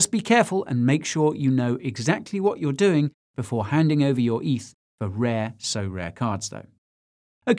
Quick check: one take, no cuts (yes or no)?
yes